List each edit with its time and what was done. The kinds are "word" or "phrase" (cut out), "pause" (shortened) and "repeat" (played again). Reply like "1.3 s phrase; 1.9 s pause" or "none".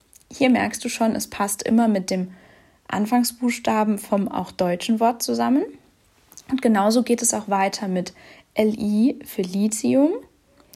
none